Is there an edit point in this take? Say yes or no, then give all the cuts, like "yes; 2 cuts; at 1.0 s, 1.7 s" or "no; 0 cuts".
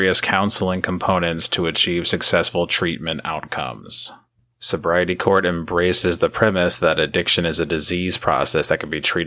no; 0 cuts